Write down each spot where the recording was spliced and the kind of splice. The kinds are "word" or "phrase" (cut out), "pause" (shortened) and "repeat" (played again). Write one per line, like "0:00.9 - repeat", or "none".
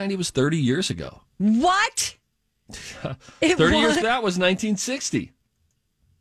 0:01.3 - pause
0:04.0 - word